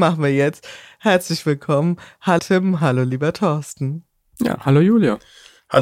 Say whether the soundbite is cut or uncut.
cut